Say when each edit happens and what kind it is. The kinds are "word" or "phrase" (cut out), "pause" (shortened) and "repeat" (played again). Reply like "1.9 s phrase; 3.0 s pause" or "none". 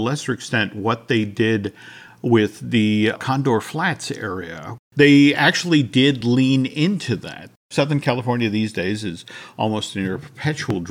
none